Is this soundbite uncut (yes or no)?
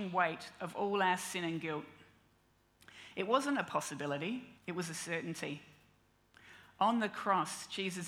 no